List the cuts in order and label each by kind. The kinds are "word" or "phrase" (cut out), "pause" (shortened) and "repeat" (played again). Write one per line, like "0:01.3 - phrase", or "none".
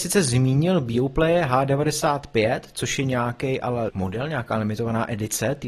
0:03.9 - word